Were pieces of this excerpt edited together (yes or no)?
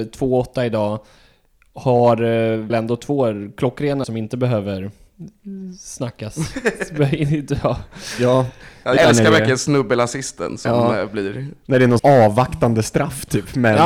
yes